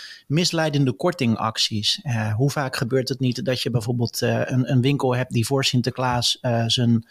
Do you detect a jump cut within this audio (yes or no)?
no